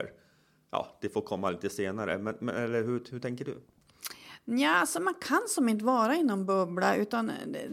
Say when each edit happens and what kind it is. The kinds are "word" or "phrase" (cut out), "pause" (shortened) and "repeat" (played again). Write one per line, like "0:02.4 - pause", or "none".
none